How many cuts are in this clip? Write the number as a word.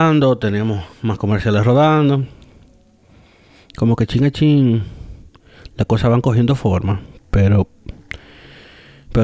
zero